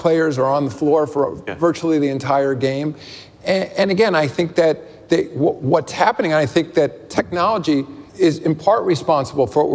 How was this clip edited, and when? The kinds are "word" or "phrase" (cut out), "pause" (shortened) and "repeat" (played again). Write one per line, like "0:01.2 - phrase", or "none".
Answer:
0:08.1 - pause